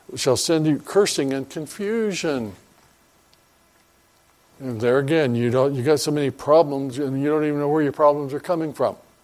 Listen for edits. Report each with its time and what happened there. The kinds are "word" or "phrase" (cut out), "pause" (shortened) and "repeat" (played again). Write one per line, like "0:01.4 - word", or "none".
none